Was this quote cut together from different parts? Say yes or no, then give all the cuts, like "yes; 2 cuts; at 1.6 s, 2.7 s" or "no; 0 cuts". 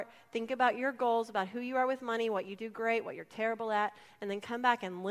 no; 0 cuts